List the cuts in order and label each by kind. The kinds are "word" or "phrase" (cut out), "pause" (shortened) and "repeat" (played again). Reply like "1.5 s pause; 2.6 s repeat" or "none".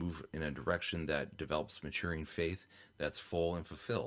none